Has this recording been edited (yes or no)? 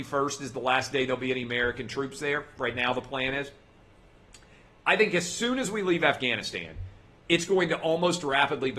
no